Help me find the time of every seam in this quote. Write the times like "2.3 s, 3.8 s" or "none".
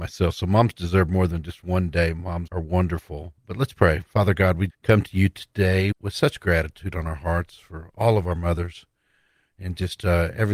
2.5 s, 4.7 s, 5.9 s